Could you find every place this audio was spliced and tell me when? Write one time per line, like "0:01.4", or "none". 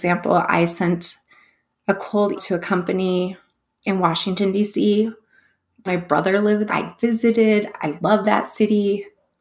0:02.4
0:05.9
0:06.7

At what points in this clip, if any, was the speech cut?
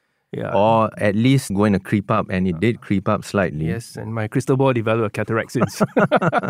0:01.5

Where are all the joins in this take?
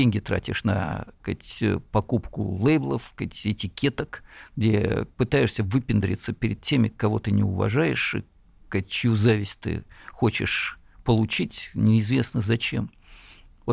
none

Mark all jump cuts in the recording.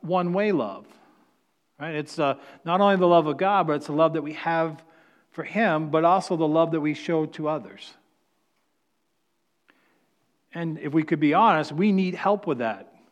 none

